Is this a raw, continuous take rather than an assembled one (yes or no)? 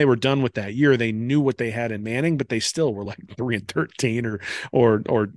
yes